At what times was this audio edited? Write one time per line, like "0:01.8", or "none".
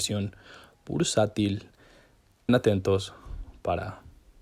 0:02.5